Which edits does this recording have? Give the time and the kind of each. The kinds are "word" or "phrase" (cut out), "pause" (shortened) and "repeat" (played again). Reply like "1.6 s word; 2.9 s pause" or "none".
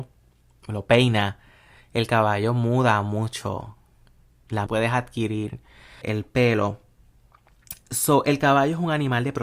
4.7 s phrase; 6.0 s word